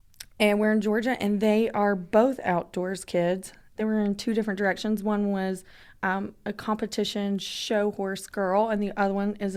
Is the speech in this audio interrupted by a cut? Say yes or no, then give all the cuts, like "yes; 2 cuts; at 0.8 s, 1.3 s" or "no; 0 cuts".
no; 0 cuts